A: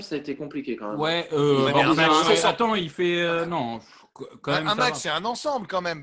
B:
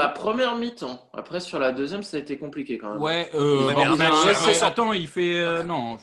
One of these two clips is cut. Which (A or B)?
A